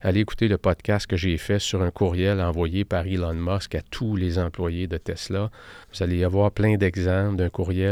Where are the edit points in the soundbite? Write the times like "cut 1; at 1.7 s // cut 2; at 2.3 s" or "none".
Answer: cut 1; at 5.8 s